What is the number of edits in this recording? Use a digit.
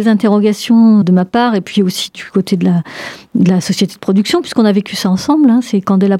1